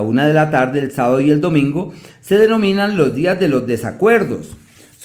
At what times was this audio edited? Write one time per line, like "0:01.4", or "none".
none